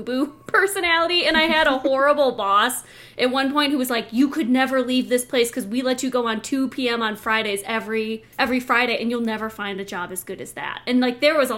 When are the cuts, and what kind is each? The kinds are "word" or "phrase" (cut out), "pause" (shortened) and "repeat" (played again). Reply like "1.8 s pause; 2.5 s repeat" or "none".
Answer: 8.3 s pause